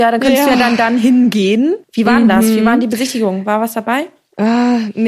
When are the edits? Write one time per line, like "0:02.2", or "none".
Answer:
0:01.8